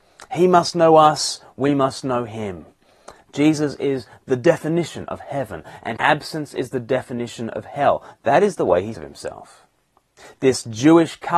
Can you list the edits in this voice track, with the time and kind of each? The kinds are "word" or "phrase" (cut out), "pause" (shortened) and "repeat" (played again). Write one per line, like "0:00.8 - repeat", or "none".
0:06.0 - word
0:08.9 - word